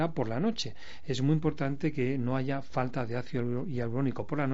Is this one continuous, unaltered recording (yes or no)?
yes